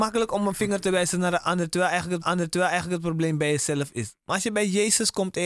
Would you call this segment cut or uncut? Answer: cut